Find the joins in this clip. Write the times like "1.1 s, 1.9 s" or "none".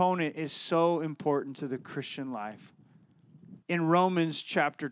3.6 s